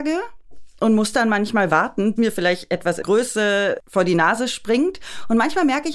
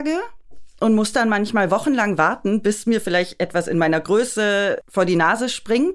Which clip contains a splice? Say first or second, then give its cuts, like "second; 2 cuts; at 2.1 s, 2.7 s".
first; 3 cuts; at 1.7 s, 2.2 s, 3.0 s